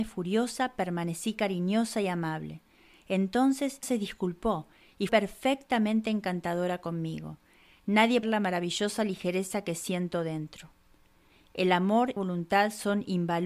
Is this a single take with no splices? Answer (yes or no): no